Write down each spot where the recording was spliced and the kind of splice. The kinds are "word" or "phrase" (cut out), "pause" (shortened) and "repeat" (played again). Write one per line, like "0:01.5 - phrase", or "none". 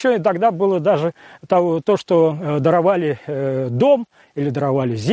none